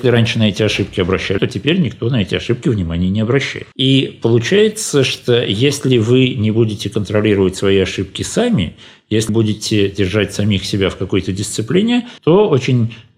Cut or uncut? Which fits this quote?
cut